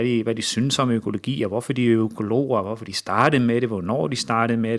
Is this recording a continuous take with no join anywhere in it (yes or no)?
yes